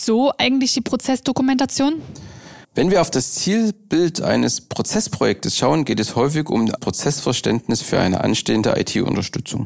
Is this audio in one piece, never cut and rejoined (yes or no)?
no